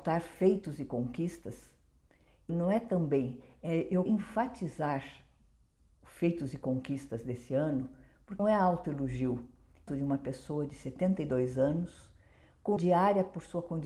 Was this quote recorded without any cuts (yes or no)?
no